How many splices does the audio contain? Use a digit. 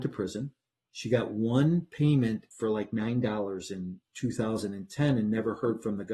0